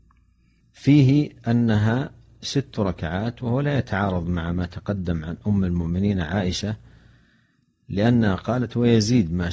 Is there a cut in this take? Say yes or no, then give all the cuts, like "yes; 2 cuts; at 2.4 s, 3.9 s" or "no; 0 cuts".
no; 0 cuts